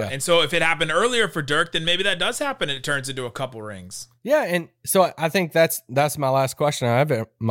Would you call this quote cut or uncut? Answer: cut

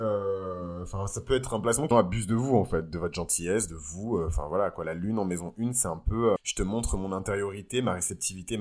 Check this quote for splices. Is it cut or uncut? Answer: cut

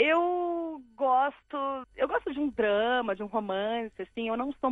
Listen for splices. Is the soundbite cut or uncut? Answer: uncut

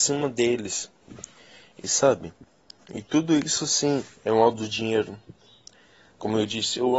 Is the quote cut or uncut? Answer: uncut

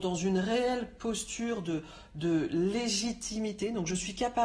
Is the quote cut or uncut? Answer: uncut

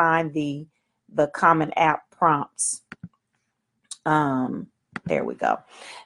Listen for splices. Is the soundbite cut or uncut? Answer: uncut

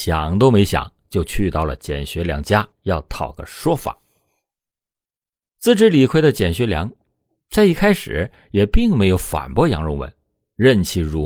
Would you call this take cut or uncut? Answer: cut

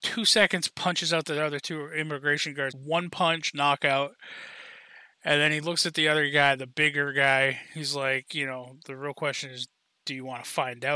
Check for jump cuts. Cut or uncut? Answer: cut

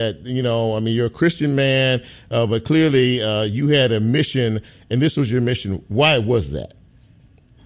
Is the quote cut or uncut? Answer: uncut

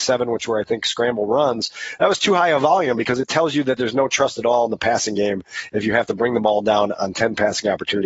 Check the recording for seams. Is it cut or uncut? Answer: uncut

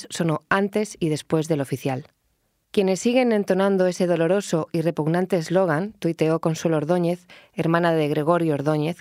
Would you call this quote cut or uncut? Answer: uncut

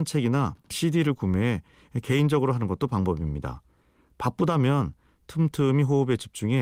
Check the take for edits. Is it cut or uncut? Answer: uncut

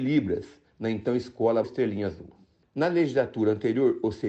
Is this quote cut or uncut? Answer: cut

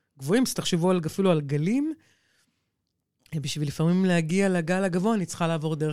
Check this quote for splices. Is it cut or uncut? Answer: uncut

